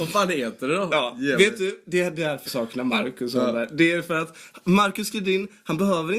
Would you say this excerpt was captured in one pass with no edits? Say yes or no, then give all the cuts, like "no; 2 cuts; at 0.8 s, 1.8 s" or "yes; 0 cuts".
no; 1 cut; at 2.5 s